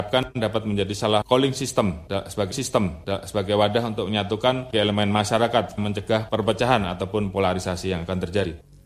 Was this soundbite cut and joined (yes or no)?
yes